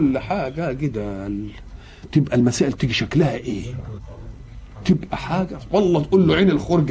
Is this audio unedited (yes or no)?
yes